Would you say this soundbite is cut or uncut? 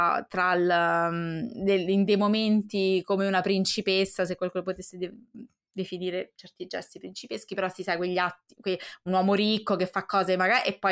uncut